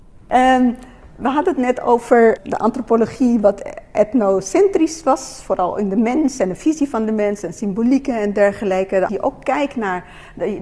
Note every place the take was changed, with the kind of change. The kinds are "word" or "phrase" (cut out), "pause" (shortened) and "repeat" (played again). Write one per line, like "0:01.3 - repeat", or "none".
0:02.4 - word
0:09.1 - word